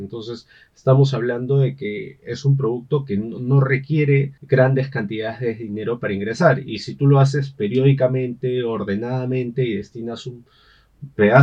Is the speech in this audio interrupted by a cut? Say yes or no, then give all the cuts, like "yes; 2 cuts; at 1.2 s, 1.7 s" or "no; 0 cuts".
yes; 1 cut; at 4.4 s